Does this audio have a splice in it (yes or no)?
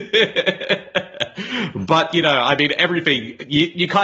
no